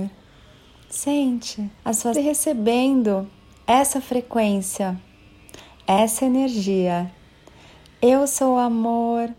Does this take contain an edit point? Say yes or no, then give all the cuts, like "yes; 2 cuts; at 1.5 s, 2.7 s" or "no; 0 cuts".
yes; 2 cuts; at 1.8 s, 2.1 s